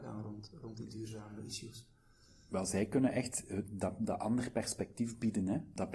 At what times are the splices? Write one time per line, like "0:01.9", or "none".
none